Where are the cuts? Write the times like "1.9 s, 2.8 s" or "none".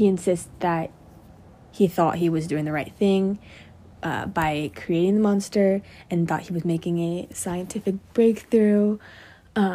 none

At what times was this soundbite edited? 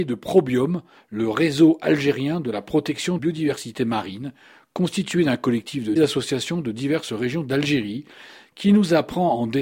3.2 s, 6.0 s

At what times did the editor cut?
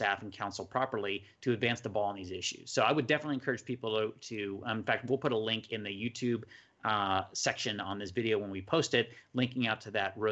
none

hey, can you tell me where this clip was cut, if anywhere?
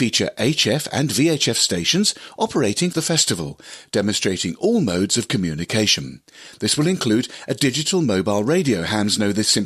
2.9 s

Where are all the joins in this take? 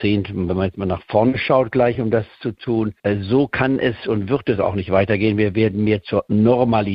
none

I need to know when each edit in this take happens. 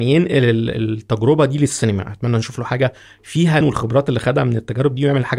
3.6 s

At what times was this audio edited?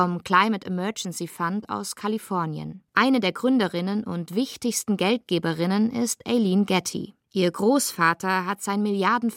2.9 s, 7.2 s

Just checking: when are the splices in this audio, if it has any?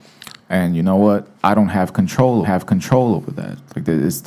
1.4 s, 2.4 s

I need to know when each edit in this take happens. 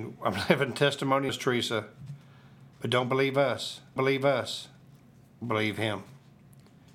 1.3 s, 2.7 s, 4.0 s

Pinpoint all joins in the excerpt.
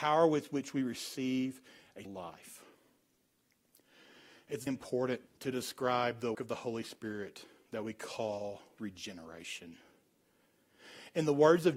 2.0 s, 4.7 s, 5.3 s, 6.3 s, 8.8 s

